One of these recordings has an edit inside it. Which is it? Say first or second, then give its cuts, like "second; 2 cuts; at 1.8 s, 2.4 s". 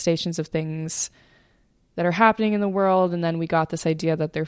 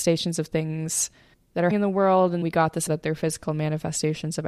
second; 4 cuts; at 1.3 s, 1.7 s, 2.4 s, 2.9 s